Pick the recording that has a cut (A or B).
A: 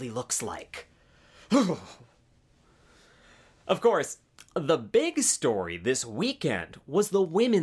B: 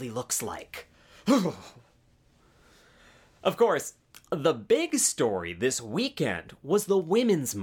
B